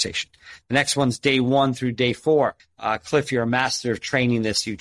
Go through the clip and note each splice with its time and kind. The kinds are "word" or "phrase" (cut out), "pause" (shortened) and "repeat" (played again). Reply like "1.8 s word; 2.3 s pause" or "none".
2.6 s pause